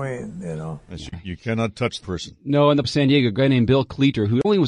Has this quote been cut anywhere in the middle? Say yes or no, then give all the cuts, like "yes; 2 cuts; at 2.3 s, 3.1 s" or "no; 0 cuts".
yes; 2 cuts; at 2.0 s, 2.8 s